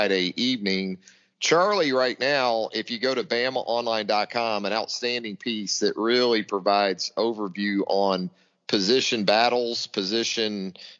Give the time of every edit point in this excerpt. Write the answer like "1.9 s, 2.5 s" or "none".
none